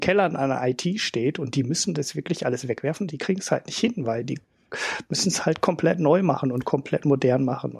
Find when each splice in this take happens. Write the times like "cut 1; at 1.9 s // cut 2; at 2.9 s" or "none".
none